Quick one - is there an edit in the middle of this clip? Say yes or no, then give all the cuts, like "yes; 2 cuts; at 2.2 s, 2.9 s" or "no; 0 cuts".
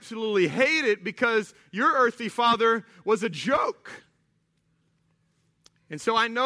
no; 0 cuts